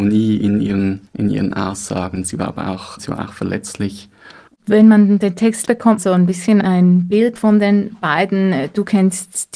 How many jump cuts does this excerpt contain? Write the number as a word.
seven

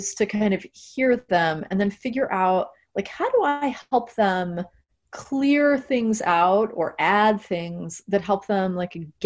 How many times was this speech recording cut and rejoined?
zero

